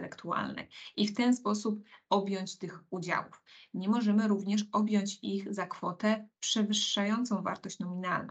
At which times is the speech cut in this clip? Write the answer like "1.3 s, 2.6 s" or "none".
none